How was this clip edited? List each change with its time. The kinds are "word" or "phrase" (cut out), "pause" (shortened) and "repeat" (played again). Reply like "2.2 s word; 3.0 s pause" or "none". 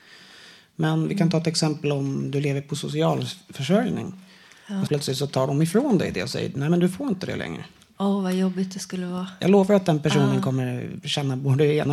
4.9 s word